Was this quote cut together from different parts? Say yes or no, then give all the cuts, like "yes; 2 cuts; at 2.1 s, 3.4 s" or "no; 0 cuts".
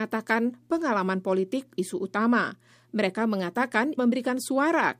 yes; 2 cuts; at 1.8 s, 4.0 s